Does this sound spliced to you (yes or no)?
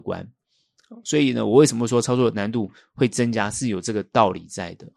no